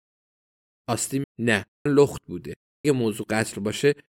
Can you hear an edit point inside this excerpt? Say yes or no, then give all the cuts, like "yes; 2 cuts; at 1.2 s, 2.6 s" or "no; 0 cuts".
yes; 3 cuts; at 1.2 s, 1.9 s, 2.8 s